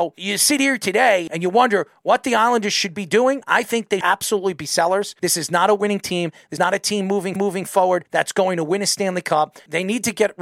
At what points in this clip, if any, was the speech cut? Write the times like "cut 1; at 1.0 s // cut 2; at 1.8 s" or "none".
cut 1; at 4.0 s // cut 2; at 6.6 s // cut 3; at 7.4 s